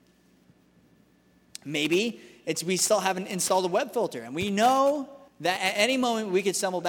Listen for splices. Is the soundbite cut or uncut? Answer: cut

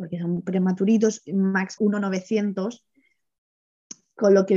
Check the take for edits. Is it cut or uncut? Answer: cut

